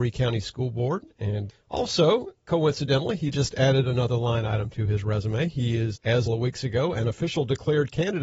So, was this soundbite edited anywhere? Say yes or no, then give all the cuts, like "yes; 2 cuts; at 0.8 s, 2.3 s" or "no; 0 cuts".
yes; 1 cut; at 6.3 s